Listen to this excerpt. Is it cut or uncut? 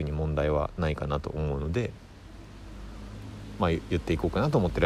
uncut